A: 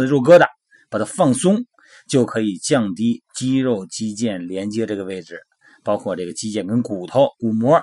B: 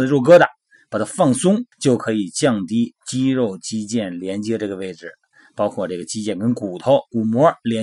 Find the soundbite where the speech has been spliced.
B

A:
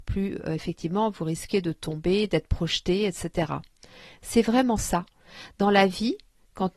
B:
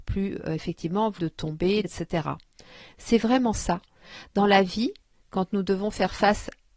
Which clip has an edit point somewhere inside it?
B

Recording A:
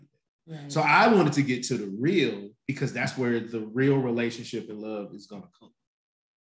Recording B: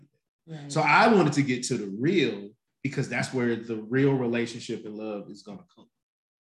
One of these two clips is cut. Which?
A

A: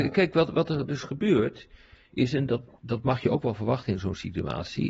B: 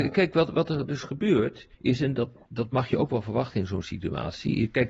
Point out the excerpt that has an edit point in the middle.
B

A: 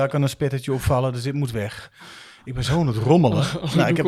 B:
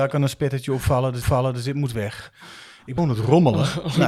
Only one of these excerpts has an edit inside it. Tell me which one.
B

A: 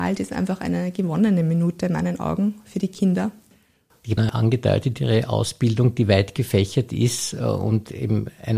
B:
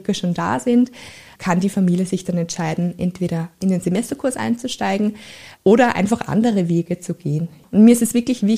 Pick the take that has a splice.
A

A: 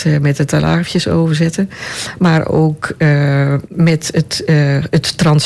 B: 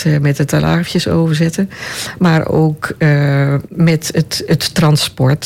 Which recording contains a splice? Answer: B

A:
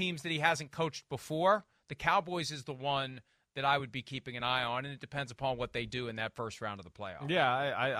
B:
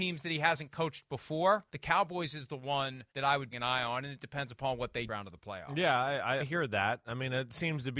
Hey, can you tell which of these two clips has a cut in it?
B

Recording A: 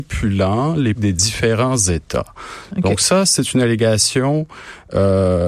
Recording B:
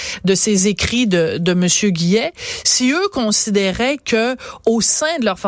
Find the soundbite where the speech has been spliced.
A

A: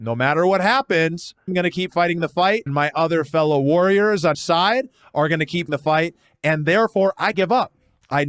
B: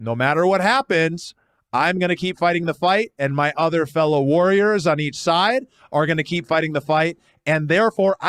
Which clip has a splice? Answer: A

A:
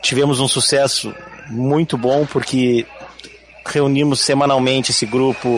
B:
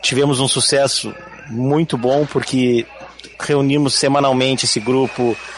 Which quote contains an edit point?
B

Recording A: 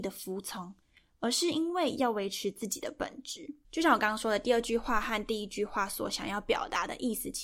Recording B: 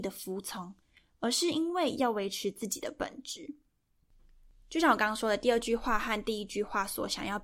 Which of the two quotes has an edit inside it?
A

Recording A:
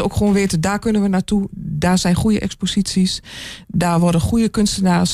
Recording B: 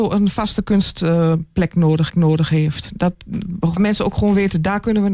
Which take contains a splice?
B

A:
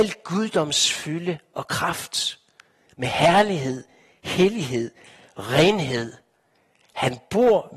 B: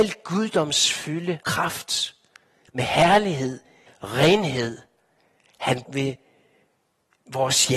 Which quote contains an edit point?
B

